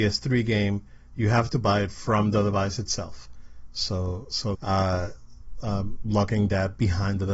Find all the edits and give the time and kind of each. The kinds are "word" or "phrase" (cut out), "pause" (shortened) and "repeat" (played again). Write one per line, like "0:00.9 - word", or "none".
0:04.5 - phrase